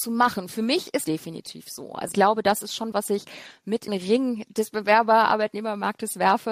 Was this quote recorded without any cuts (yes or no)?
no